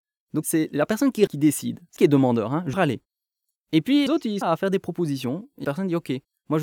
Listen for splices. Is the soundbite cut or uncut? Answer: cut